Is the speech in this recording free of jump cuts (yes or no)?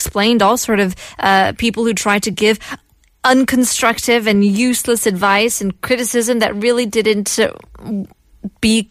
yes